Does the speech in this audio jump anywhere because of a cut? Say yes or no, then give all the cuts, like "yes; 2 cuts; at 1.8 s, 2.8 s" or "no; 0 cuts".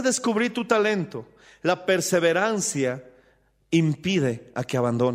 no; 0 cuts